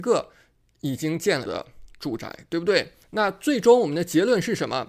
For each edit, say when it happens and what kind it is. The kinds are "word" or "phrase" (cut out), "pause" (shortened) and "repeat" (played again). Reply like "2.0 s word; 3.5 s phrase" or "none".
1.5 s word; 3.0 s pause